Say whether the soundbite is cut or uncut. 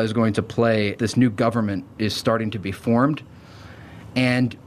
cut